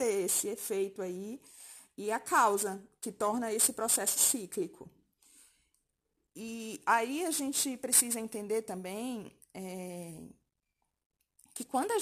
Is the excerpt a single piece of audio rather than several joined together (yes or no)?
yes